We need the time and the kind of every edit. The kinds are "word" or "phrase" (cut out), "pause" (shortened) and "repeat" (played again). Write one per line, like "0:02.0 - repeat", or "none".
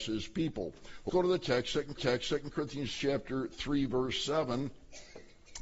0:01.1 - word
0:02.0 - repeat